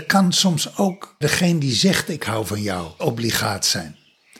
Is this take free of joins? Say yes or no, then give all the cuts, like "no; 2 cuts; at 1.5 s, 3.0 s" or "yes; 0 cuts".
no; 2 cuts; at 1.2 s, 3.0 s